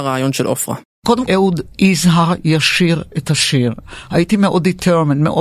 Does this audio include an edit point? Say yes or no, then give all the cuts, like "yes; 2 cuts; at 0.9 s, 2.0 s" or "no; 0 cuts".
yes; 2 cuts; at 1.3 s, 1.7 s